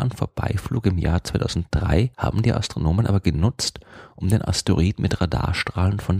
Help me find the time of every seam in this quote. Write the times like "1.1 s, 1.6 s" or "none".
2.1 s